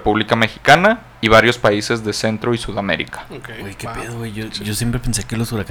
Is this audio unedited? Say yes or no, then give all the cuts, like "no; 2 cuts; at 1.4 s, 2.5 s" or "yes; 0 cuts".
yes; 0 cuts